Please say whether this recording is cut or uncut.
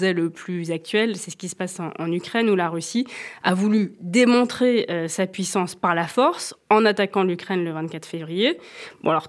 uncut